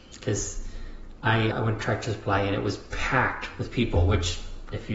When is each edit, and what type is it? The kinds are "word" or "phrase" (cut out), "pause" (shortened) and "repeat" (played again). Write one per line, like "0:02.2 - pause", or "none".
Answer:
0:01.5 - word